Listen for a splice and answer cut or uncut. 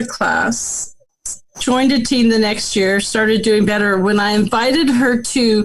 uncut